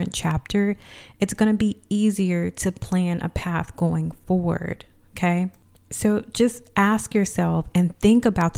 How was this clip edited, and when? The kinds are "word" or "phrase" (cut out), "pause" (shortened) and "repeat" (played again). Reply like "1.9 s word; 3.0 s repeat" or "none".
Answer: none